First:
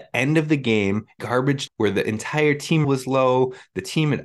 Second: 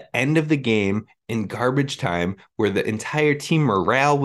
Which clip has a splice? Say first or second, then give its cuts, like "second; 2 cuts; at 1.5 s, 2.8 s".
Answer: first; 3 cuts; at 1.2 s, 1.7 s, 2.8 s